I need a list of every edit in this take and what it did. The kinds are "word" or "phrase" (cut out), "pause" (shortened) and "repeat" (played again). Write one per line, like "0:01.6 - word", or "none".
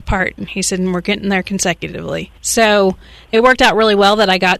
0:02.4 - pause